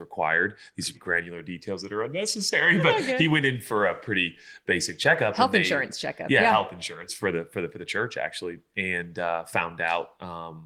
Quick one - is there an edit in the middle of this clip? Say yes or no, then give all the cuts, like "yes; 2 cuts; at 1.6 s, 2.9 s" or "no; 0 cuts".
yes; 1 cut; at 0.9 s